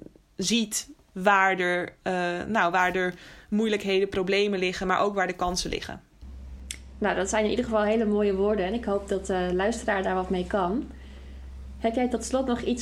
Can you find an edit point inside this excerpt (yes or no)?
no